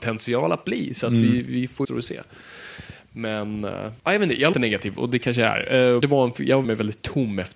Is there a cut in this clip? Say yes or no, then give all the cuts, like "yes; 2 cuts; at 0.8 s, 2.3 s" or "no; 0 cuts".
yes; 6 cuts; at 1.8 s, 4.0 s, 4.5 s, 5.0 s, 6.0 s, 6.6 s